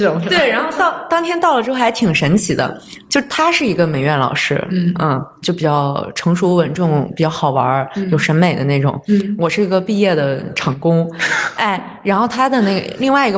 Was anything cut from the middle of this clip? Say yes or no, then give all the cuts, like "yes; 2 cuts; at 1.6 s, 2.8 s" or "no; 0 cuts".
no; 0 cuts